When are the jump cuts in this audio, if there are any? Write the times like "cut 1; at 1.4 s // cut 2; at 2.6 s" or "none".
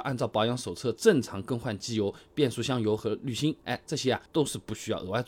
cut 1; at 4.3 s